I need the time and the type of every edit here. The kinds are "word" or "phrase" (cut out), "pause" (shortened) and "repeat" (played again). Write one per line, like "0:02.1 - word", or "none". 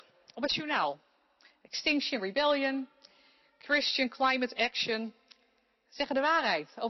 none